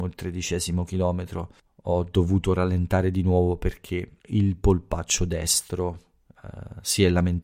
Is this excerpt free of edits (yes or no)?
no